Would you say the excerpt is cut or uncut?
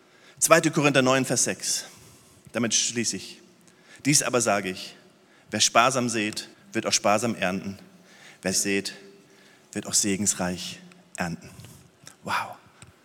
cut